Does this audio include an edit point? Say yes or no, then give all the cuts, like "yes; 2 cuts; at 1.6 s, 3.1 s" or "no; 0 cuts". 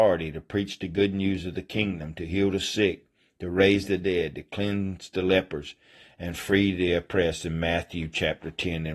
no; 0 cuts